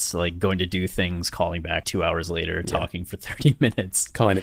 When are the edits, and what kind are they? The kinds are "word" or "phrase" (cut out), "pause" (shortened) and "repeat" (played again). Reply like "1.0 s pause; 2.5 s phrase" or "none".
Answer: 1.8 s word